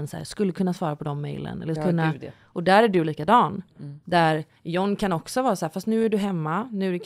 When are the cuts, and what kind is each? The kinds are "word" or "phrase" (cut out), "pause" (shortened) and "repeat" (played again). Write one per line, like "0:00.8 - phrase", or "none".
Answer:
0:01.8 - word